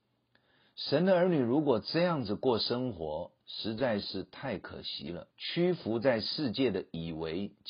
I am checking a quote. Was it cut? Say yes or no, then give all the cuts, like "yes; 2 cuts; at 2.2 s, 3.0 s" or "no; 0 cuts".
yes; 2 cuts; at 3.4 s, 5.3 s